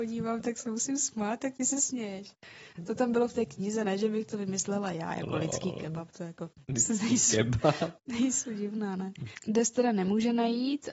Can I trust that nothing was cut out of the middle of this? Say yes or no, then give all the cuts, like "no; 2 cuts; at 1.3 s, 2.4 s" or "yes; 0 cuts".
yes; 0 cuts